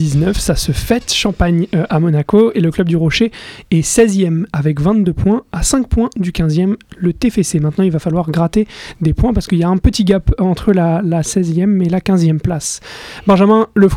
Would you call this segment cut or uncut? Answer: uncut